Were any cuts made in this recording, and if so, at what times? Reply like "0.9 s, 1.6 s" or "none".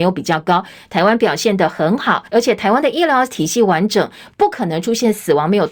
2.3 s

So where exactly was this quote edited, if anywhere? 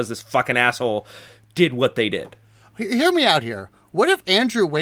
none

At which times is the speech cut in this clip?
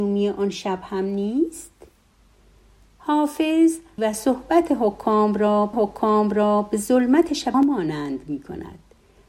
4.0 s, 5.7 s, 7.5 s

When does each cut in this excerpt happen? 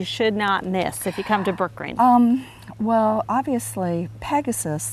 none

